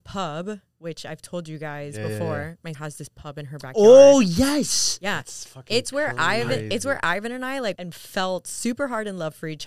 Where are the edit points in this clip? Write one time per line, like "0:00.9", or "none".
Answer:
0:02.7
0:07.8